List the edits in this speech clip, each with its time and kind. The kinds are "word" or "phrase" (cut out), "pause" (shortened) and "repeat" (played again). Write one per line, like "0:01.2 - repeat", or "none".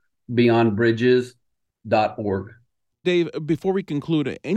0:03.0 - word